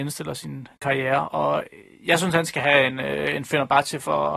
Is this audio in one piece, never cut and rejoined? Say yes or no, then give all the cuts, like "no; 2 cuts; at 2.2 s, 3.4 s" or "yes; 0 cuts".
yes; 0 cuts